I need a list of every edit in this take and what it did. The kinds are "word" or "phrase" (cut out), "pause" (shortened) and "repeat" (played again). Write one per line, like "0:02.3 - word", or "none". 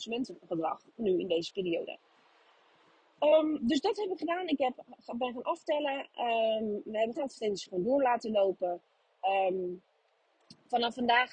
0:07.2 - phrase